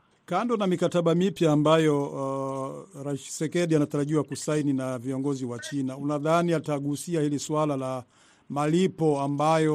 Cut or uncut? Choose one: uncut